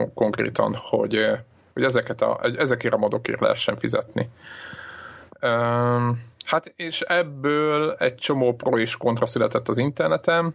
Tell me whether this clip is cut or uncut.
uncut